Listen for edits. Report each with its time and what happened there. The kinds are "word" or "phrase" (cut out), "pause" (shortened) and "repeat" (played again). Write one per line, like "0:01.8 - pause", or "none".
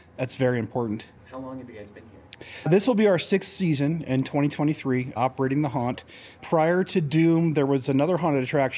0:01.2 - pause